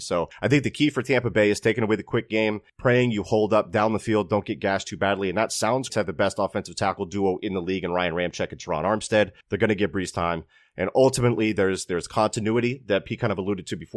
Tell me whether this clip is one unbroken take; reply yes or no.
no